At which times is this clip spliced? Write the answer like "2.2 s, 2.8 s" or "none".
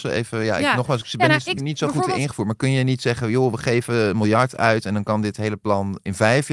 1.6 s